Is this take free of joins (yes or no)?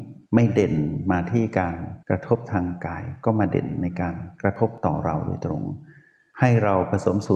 no